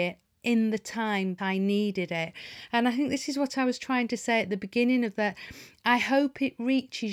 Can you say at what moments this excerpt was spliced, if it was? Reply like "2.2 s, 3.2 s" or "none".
1.4 s, 5.1 s